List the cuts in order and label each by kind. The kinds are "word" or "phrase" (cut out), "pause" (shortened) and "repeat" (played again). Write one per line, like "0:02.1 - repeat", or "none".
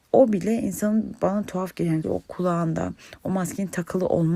0:02.0 - word